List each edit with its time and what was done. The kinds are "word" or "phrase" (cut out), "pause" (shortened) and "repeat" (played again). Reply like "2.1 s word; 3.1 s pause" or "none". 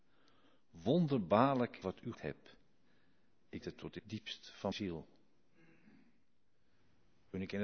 1.8 s word; 2.1 s word; 3.6 s word; 4.0 s word; 4.7 s word